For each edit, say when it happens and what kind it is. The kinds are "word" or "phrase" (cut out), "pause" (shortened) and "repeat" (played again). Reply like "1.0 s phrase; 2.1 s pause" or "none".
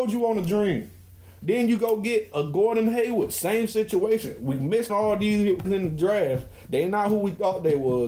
2.3 s word; 4.9 s word; 5.6 s word